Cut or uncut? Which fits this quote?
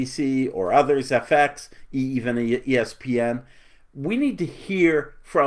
uncut